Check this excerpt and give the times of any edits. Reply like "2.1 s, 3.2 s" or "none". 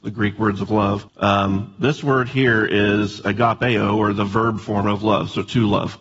1.1 s